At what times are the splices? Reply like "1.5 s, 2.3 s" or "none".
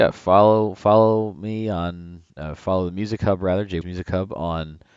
2.3 s, 3.8 s